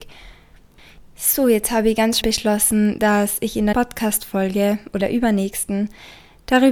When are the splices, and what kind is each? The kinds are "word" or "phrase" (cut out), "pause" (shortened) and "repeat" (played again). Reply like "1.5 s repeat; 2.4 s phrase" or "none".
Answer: 2.2 s word; 3.7 s word; 5.0 s word